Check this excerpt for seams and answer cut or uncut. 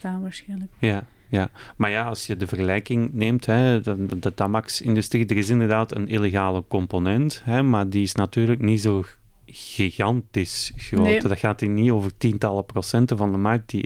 uncut